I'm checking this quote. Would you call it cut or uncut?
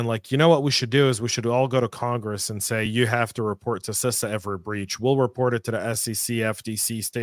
uncut